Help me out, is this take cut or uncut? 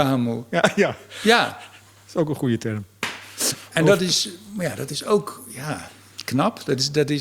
uncut